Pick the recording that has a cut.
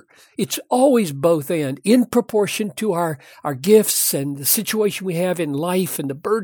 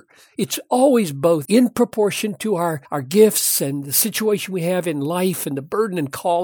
second; 2 cuts; at 1.4 s, 2.8 s

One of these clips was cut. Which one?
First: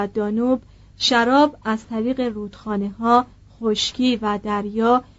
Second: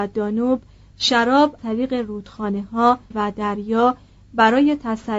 second; 2 cuts; at 1.6 s, 3.1 s

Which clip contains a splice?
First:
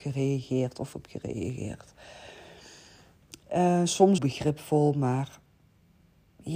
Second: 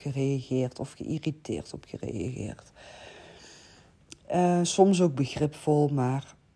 first; 2 cuts; at 0.9 s, 4.2 s

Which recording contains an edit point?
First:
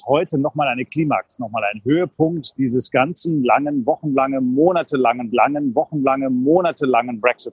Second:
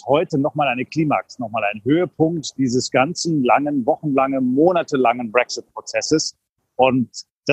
first; 1 cut; at 5.3 s

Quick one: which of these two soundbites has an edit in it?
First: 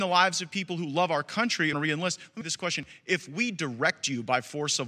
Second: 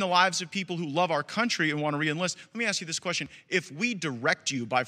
first; 2 cuts; at 1.7 s, 2.4 s

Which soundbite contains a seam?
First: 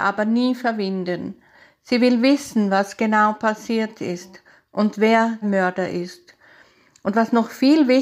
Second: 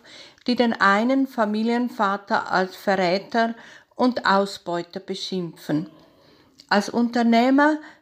first; 1 cut; at 5.4 s

